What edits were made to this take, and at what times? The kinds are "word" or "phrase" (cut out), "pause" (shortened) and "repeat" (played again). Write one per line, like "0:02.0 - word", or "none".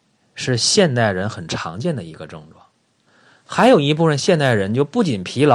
none